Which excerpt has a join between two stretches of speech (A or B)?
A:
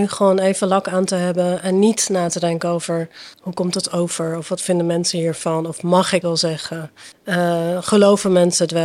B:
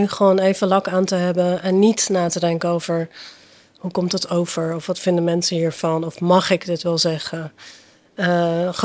A